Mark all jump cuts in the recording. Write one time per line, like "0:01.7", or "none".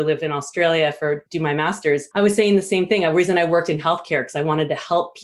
0:01.3
0:02.1